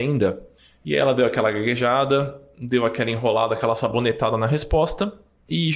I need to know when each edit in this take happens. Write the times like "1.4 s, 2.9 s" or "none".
none

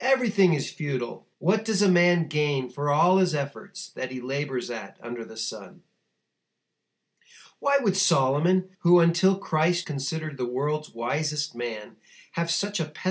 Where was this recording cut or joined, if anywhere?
1.3 s, 8.7 s, 9.8 s

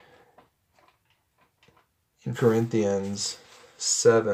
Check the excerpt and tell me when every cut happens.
2.3 s

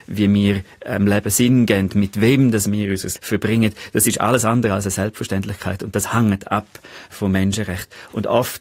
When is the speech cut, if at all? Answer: 3.2 s

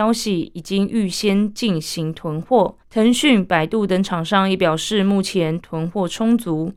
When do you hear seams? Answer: 2.8 s

